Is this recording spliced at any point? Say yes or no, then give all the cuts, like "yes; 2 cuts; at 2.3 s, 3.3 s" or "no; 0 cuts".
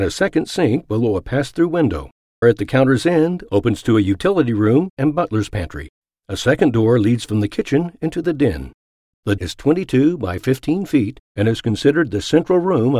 yes; 2 cuts; at 2.4 s, 9.4 s